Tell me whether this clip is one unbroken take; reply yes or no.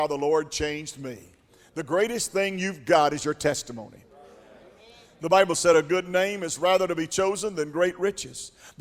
yes